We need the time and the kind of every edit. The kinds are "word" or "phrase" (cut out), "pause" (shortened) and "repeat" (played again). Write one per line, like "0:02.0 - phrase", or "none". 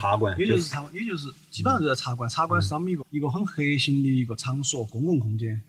0:03.0 - word

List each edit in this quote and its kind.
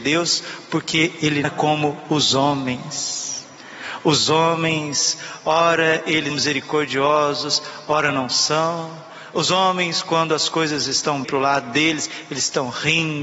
0:01.4 - word
0:06.3 - word
0:11.2 - word

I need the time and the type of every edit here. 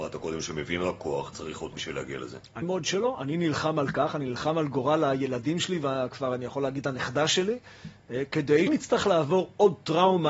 0:01.7 - word
0:02.6 - word
0:08.7 - word

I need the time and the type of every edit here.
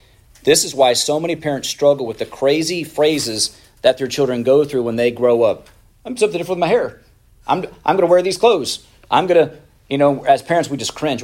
none

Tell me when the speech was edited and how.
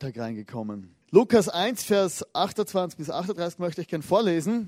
0:01.0 - pause

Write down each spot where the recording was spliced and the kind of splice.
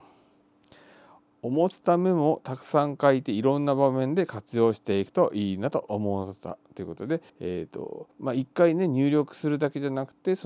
0:07.3 - pause
0:08.1 - pause

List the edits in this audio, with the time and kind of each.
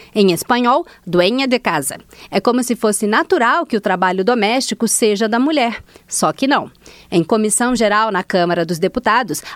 none

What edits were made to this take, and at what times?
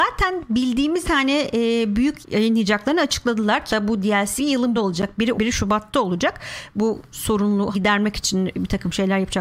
0:01.0 - word
0:02.2 - word
0:03.7 - word
0:04.4 - word
0:04.7 - word
0:05.3 - word
0:07.1 - word
0:07.7 - word

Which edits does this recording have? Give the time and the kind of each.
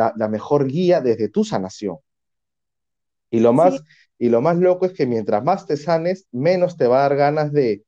none

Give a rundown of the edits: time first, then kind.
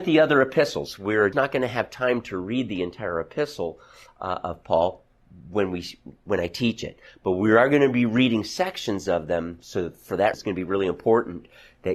0:01.3 - word
0:10.3 - word

